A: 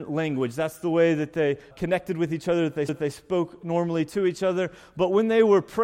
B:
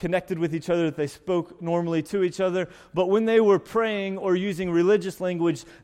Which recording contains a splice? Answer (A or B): A